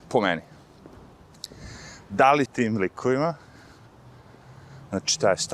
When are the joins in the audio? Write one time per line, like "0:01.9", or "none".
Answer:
0:02.4

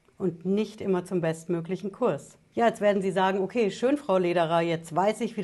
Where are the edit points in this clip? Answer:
none

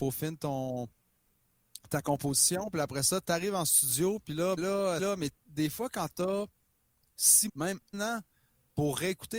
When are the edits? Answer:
0:04.6
0:05.0
0:07.5
0:07.9

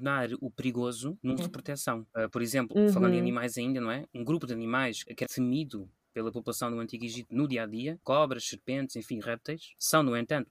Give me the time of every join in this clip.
0:01.4
0:05.2
0:08.0
0:09.2

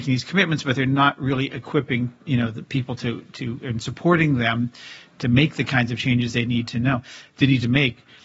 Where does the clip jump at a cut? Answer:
0:02.2

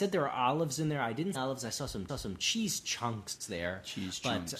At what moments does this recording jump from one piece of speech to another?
0:01.3
0:02.1

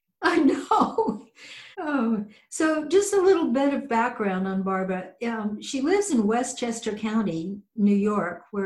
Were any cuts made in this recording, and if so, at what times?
0:01.7

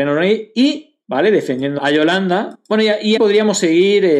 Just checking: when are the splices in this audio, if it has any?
0:01.0
0:01.8
0:03.2

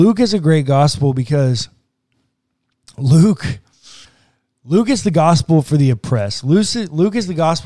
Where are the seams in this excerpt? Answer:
none

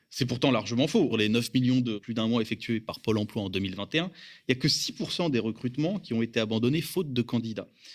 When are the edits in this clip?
0:01.1
0:02.0

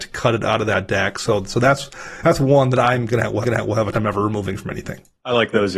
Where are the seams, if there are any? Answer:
0:03.4
0:03.9

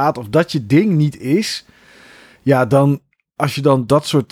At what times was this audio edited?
none

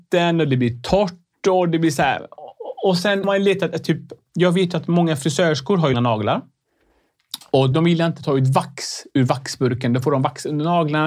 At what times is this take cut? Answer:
0:03.2
0:05.9
0:07.7

